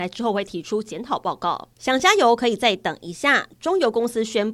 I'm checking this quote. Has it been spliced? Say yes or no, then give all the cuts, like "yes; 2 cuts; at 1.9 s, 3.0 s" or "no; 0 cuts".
yes; 1 cut; at 1.7 s